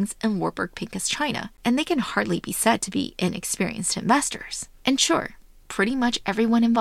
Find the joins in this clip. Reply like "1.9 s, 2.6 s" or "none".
1.6 s